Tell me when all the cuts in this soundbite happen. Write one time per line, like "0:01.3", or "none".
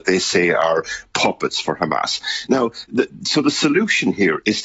none